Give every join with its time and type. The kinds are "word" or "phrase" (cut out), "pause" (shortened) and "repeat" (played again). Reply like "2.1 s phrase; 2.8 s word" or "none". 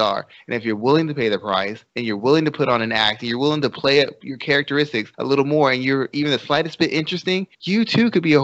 1.9 s pause; 5.1 s pause; 7.5 s pause